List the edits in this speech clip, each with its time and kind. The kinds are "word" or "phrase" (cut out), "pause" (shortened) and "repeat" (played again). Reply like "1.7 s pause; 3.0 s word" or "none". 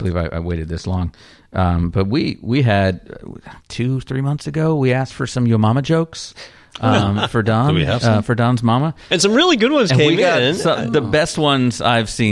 3.6 s pause